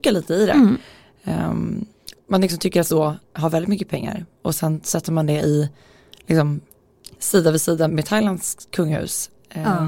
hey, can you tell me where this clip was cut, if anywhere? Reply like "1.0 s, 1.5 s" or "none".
2.9 s, 7.9 s